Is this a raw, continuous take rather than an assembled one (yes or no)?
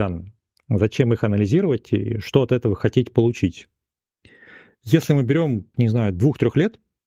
no